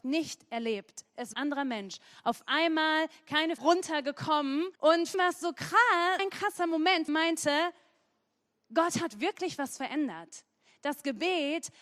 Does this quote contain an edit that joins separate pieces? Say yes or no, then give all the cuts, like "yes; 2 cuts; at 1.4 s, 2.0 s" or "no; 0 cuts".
yes; 6 cuts; at 1.3 s, 3.6 s, 4.8 s, 5.1 s, 6.2 s, 7.1 s